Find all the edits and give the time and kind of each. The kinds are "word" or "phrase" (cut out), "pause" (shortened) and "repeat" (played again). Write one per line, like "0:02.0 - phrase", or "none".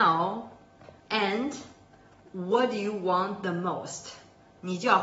0:01.0 - pause